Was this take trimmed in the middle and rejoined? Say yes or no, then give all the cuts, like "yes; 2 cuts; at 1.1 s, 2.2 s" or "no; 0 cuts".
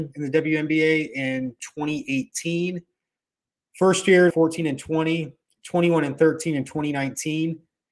yes; 1 cut; at 4.3 s